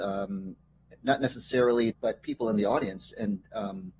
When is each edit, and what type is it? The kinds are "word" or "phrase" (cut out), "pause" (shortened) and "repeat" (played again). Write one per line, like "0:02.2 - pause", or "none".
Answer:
0:01.9 - phrase